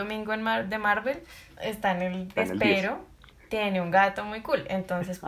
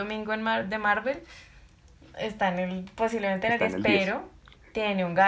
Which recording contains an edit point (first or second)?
first